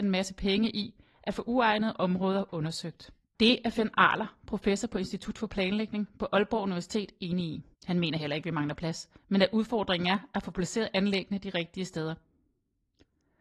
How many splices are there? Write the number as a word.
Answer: two